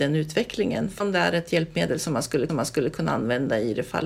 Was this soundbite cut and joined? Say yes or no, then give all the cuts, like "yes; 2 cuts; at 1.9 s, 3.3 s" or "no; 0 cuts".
yes; 2 cuts; at 1.0 s, 2.5 s